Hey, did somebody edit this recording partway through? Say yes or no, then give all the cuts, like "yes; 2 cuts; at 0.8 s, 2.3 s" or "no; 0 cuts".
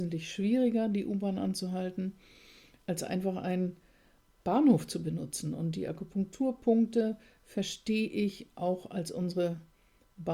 no; 0 cuts